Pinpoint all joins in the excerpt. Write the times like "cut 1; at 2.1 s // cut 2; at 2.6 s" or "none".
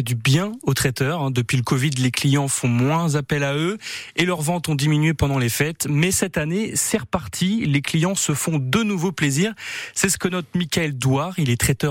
none